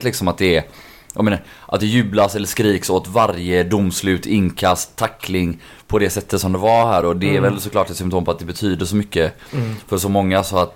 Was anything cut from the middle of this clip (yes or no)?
no